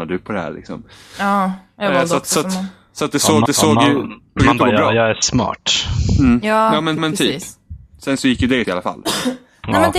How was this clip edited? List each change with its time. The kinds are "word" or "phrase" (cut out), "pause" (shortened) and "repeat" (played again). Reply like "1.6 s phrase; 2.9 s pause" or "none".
3.5 s repeat; 4.4 s word; 7.0 s repeat; 8.6 s word